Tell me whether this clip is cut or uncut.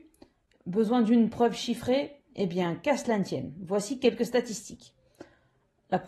uncut